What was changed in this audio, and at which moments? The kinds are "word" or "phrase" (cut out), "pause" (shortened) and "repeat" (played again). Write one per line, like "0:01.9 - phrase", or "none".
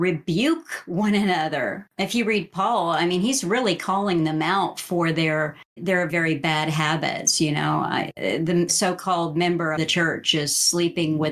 0:05.8 - word
0:06.1 - word
0:08.7 - word
0:09.8 - word